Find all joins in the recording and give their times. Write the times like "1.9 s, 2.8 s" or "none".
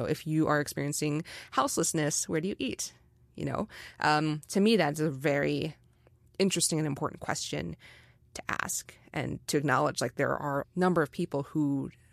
10.6 s